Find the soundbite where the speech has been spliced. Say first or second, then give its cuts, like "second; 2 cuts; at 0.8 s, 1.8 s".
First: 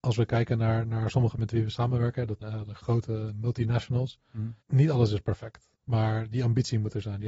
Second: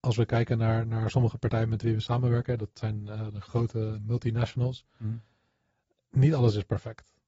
first; 4 cuts; at 1.4 s, 2.4 s, 4.6 s, 5.8 s